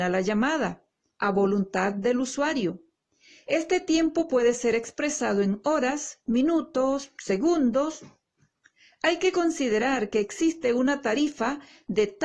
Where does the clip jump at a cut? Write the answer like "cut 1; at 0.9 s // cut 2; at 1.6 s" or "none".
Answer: none